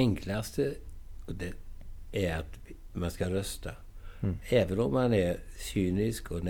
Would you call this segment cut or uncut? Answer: uncut